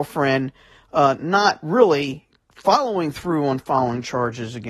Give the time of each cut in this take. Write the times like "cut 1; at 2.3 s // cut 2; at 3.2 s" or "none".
none